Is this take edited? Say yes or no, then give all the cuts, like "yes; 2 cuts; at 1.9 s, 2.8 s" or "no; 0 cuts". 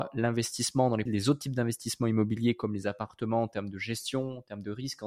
yes; 1 cut; at 1.1 s